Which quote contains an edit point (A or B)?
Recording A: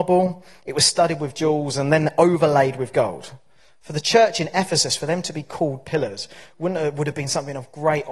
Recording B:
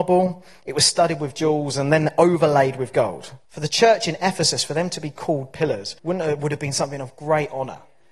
B